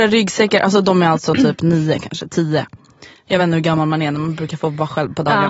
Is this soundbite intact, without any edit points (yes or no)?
yes